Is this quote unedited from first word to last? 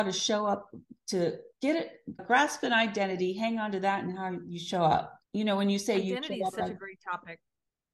no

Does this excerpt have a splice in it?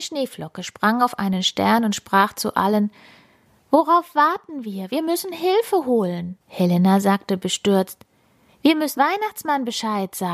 yes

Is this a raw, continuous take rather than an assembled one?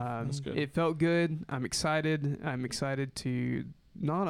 yes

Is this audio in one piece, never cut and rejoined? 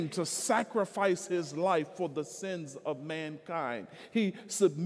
yes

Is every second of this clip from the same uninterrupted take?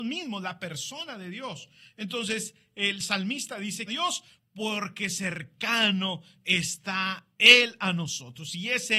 no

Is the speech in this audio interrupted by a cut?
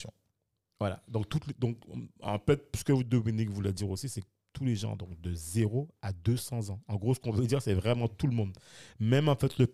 no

